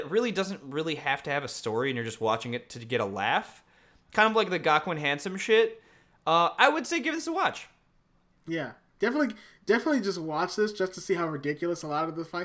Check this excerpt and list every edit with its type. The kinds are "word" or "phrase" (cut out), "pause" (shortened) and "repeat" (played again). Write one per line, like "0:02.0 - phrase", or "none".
none